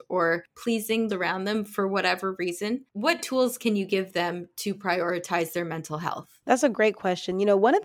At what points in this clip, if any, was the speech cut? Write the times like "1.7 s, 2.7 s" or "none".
1.1 s

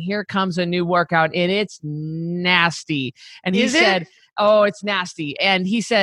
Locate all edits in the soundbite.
none

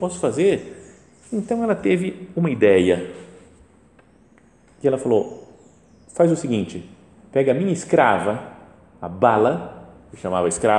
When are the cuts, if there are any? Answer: none

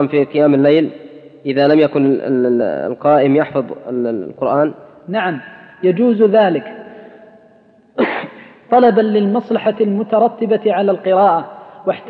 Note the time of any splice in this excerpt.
none

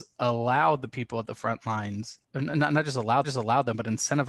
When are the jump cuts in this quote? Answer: 2.2 s, 3.2 s

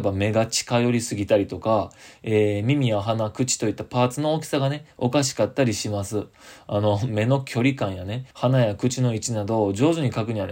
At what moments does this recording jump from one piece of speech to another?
8.3 s

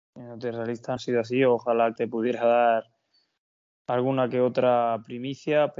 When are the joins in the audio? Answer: 1.0 s, 2.0 s

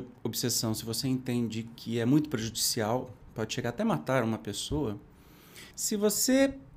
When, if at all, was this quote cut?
5.7 s

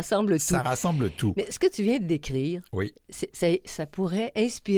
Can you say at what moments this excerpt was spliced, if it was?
none

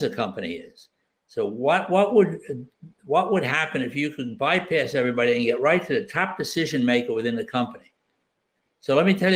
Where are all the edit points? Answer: none

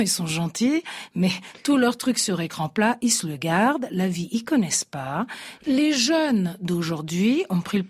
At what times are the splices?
none

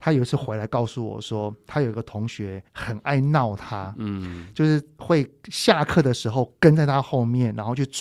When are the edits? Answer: 2.7 s

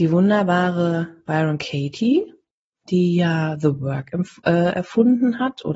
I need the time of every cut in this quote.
none

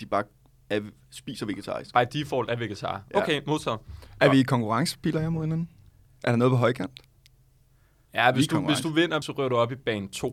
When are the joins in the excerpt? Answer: 9.2 s

